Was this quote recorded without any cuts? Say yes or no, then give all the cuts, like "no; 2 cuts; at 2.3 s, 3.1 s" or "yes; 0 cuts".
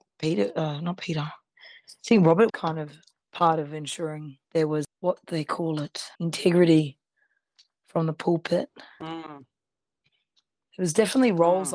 no; 4 cuts; at 2.5 s, 3.1 s, 4.4 s, 6.1 s